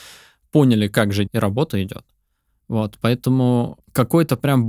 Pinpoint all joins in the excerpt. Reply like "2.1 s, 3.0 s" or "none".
1.3 s